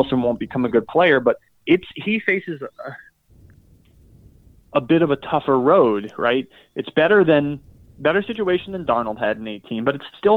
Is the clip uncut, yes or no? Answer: yes